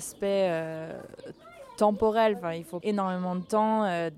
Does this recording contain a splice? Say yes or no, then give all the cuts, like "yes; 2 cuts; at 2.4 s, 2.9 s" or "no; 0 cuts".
yes; 1 cut; at 2.8 s